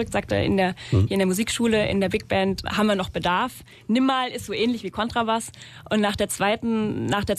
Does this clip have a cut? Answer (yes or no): yes